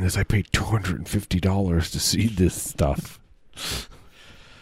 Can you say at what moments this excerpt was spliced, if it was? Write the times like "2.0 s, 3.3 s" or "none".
3.2 s

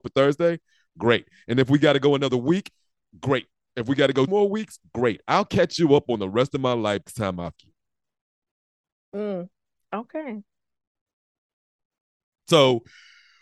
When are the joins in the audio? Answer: 4.3 s, 7.1 s, 7.6 s

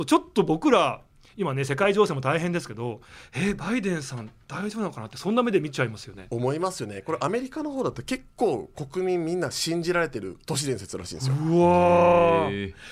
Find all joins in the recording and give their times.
10.4 s

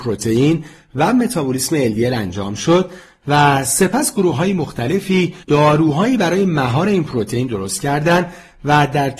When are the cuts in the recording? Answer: 5.4 s

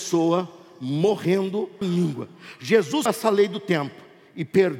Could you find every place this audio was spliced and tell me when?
1.8 s, 3.1 s

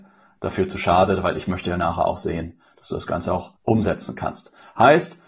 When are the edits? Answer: 3.6 s

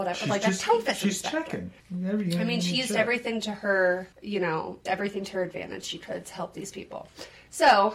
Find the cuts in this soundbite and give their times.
1.8 s, 4.1 s, 4.9 s, 5.8 s

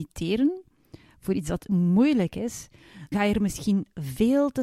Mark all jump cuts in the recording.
1.7 s, 3.1 s

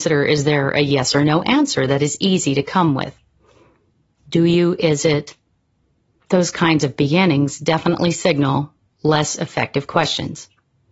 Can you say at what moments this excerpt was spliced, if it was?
none

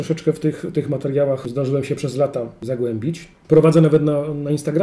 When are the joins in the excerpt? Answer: none

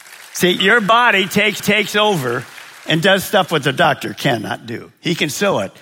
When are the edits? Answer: 1.6 s

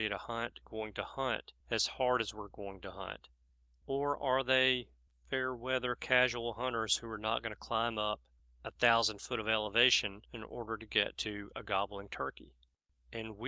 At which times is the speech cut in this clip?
none

